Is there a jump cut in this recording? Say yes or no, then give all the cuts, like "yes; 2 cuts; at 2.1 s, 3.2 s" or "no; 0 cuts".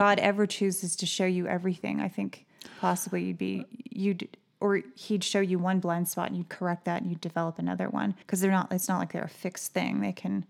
yes; 1 cut; at 8.2 s